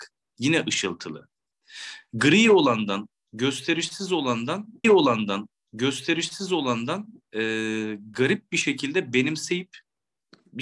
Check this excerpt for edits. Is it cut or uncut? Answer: cut